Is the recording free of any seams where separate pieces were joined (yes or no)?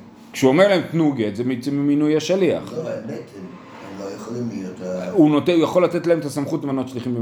yes